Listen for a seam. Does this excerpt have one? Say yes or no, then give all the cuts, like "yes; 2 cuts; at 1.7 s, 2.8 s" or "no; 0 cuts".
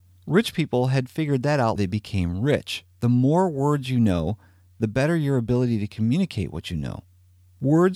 yes; 1 cut; at 1.8 s